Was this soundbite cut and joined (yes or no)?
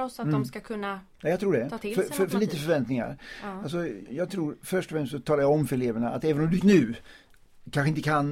yes